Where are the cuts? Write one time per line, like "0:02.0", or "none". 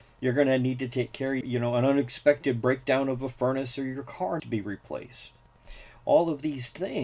0:01.4
0:04.4